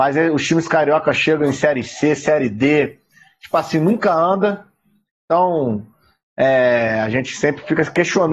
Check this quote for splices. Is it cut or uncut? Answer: uncut